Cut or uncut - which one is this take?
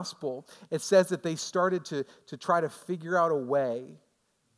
uncut